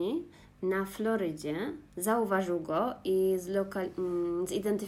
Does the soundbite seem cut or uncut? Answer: cut